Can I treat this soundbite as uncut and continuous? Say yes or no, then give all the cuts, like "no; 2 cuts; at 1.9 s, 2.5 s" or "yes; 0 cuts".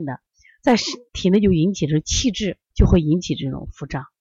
no; 2 cuts; at 1.1 s, 2.7 s